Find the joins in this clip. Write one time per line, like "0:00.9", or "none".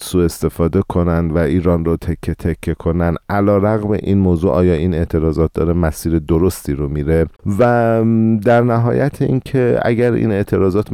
0:07.4

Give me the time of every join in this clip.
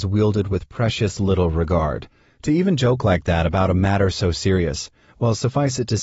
none

